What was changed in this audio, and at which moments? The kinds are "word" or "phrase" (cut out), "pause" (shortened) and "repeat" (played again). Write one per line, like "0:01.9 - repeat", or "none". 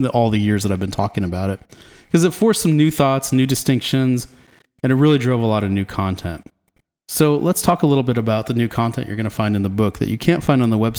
none